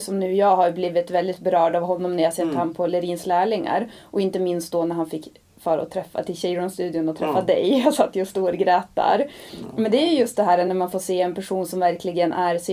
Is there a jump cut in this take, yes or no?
no